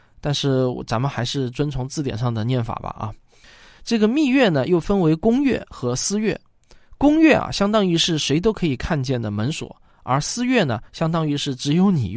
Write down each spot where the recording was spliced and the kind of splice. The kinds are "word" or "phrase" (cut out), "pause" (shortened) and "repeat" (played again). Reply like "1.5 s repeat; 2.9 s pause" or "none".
none